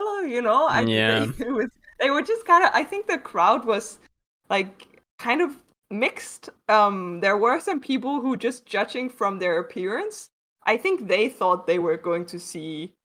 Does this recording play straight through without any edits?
yes; 0 cuts

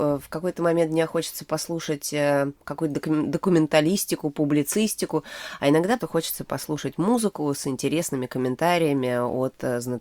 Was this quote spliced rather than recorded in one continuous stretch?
yes; 1 cut; at 6.0 s

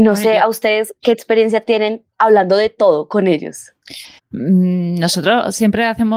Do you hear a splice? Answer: yes; 1 cut; at 4.2 s

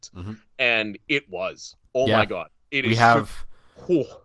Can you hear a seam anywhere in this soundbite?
no; 0 cuts

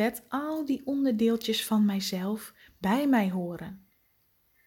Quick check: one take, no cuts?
yes; 0 cuts

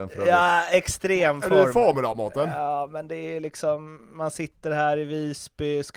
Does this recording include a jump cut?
no; 0 cuts

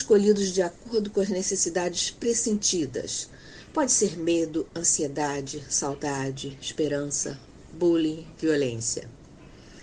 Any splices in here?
no; 0 cuts

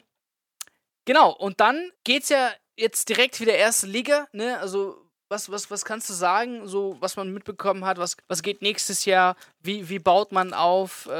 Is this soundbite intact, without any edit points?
no; 3 cuts; at 1.9 s, 5.1 s, 8.2 s

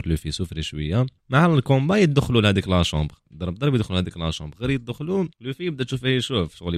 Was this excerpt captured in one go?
no; 3 cuts; at 1.2 s, 3.2 s, 5.3 s

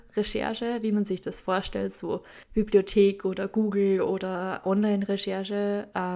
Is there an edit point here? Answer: yes; 2 cuts; at 2.4 s, 4.6 s

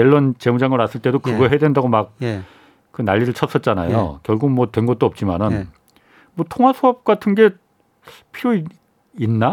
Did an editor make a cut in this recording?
no; 0 cuts

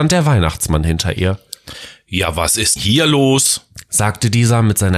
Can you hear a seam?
yes; 1 cut; at 2.8 s

